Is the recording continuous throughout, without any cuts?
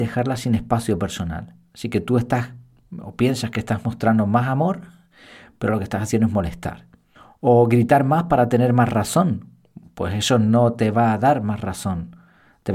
no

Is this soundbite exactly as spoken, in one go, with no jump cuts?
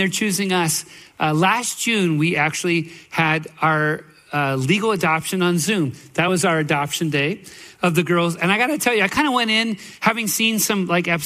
yes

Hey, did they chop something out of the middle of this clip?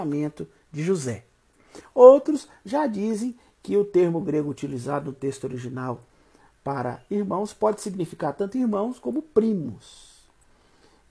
no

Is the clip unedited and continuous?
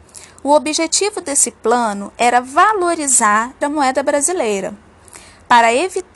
no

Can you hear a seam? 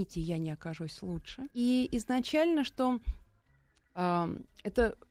yes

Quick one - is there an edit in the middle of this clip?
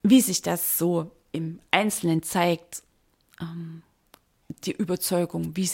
no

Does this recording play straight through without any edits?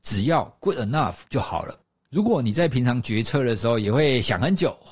no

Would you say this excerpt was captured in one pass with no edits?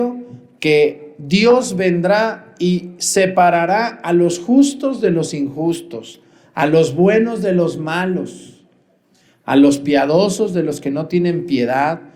yes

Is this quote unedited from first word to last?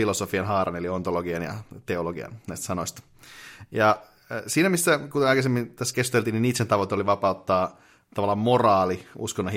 yes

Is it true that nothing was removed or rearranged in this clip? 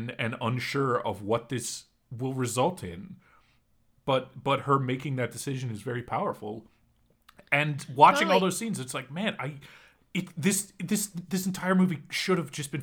yes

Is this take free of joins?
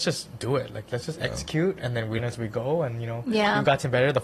no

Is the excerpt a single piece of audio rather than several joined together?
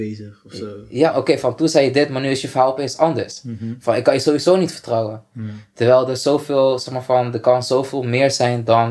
no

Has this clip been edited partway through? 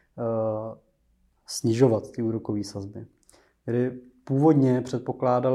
no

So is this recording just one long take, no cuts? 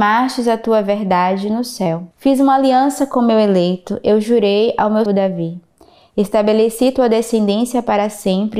no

